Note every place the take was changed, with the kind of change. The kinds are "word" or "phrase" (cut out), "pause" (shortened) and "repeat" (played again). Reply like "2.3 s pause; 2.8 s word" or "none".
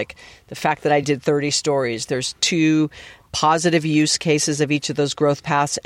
none